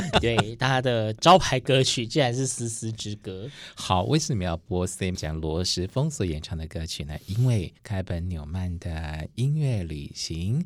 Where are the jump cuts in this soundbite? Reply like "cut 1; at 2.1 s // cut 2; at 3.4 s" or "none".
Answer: cut 1; at 5.1 s // cut 2; at 7.8 s

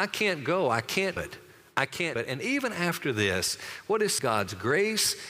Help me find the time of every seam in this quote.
cut 1; at 1.2 s // cut 2; at 2.2 s // cut 3; at 4.2 s

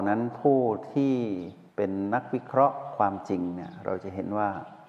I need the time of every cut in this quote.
cut 1; at 1.7 s

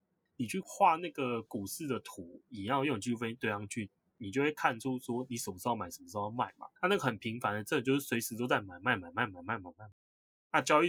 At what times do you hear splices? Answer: cut 1; at 2.5 s // cut 2; at 6.8 s

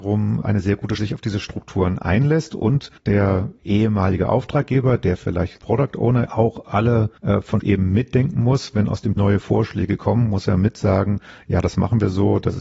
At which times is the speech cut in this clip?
cut 1; at 1.0 s // cut 2; at 3.0 s // cut 3; at 5.6 s // cut 4; at 6.2 s // cut 5; at 7.2 s // cut 6; at 7.6 s // cut 7; at 9.2 s

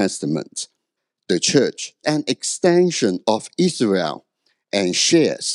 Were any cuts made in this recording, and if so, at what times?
cut 1; at 1.0 s // cut 2; at 2.0 s

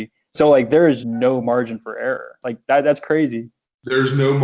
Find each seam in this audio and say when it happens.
cut 1; at 1.0 s

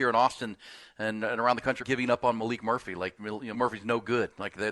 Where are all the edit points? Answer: cut 1; at 1.8 s // cut 2; at 3.2 s // cut 3; at 3.5 s

